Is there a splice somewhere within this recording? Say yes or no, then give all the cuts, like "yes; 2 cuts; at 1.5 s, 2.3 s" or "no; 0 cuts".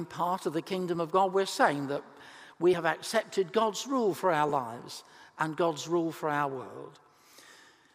no; 0 cuts